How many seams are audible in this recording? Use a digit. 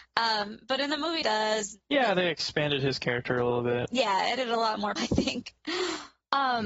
3